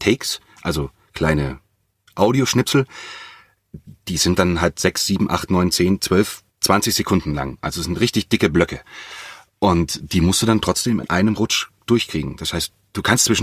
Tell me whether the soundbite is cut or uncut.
cut